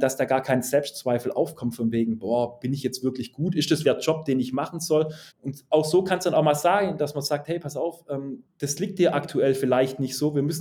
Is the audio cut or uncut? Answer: cut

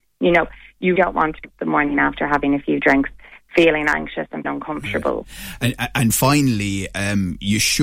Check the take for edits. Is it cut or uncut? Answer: cut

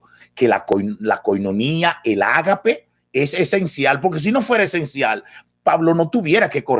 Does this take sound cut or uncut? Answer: uncut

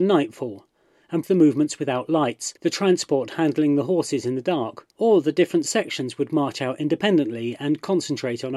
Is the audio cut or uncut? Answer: cut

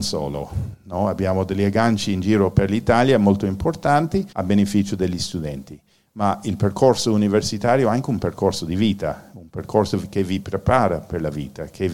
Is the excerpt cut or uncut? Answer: cut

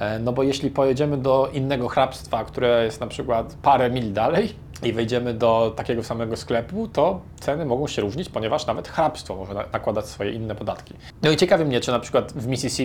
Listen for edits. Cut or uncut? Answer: uncut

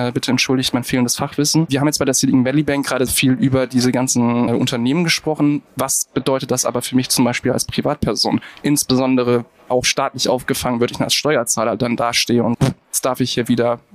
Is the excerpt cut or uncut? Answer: cut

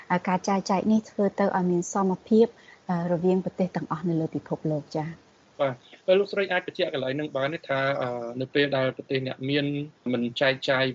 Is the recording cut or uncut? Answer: uncut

